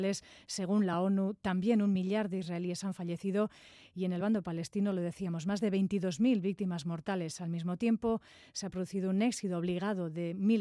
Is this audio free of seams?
yes; 0 cuts

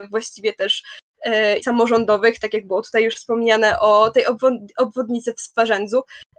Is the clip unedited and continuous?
no; 1 cut; at 1.6 s

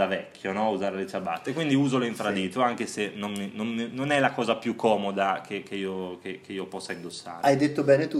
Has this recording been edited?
no; 0 cuts

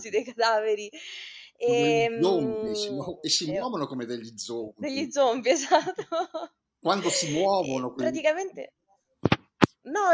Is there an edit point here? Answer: no; 0 cuts

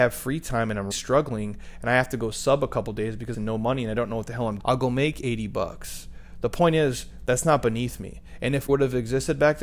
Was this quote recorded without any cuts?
no; 4 cuts; at 0.9 s, 3.3 s, 4.6 s, 8.7 s

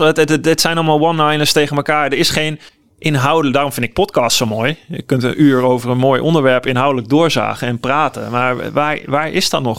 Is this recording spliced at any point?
yes; 1 cut; at 2.7 s

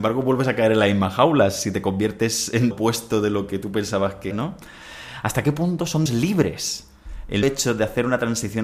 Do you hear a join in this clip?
yes; 4 cuts; at 2.7 s, 4.3 s, 6.1 s, 7.4 s

